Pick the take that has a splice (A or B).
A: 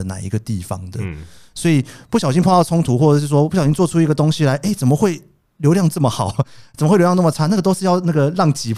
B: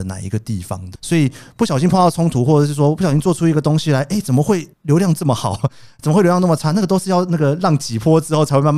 B